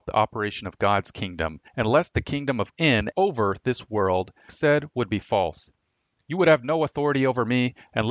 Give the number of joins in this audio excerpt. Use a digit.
4